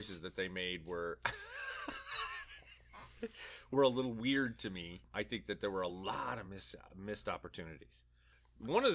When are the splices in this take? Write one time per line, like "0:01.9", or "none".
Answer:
none